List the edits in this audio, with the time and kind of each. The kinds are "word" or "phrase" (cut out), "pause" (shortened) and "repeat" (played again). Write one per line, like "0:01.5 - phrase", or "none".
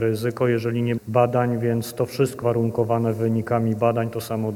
0:01.0 - phrase
0:02.4 - word